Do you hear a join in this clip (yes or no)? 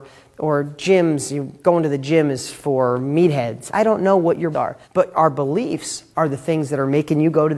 yes